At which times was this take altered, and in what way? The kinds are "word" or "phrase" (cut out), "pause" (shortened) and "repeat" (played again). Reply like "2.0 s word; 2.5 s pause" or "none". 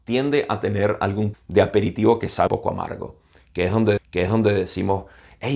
1.3 s word; 2.5 s word; 4.0 s repeat